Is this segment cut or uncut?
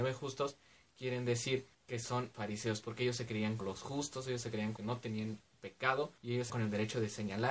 cut